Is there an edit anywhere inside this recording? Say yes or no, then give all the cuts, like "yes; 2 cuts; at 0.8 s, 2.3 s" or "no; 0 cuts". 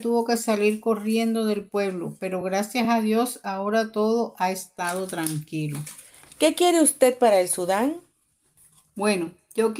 no; 0 cuts